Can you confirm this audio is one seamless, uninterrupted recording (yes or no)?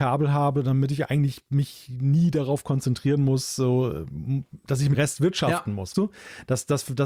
no